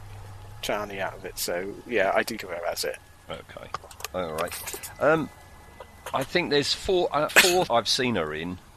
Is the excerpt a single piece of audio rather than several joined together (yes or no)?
no